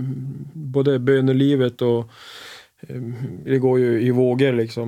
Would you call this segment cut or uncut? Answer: uncut